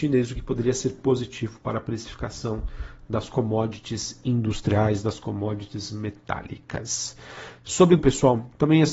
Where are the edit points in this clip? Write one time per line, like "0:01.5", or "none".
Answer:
0:08.0

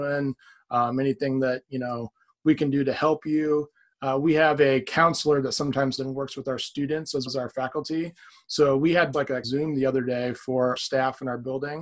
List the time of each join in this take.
0:06.0
0:07.3
0:09.1
0:09.4
0:10.8

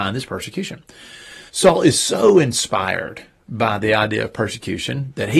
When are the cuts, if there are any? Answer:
0:01.5

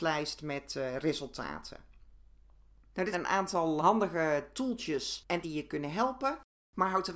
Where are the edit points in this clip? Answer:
0:03.1
0:03.8
0:05.4

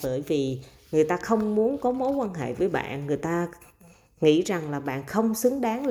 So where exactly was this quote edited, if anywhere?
none

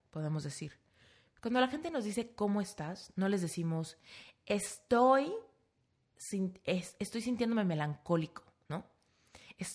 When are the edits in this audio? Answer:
none

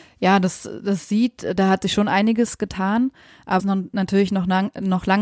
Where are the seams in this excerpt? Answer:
0:03.6

